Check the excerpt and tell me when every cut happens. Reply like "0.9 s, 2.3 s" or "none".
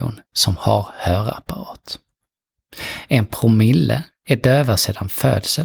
none